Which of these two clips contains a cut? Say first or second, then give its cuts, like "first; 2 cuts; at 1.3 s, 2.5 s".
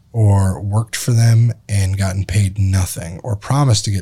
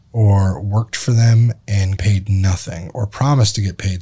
second; 1 cut; at 2.0 s